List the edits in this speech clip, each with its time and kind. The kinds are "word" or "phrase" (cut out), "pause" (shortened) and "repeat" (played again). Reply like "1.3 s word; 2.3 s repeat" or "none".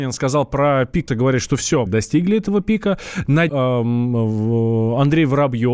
1.1 s word; 1.9 s phrase; 3.5 s word